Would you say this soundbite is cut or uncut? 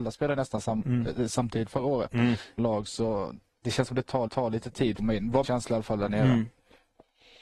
cut